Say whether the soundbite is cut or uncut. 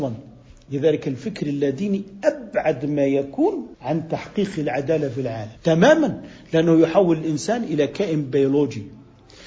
cut